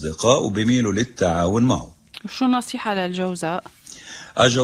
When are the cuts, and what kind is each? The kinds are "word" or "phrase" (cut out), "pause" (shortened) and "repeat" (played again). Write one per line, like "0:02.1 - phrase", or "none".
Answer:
none